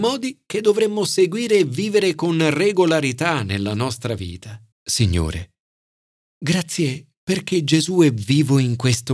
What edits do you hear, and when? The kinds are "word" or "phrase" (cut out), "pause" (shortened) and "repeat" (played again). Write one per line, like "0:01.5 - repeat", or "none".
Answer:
0:04.7 - pause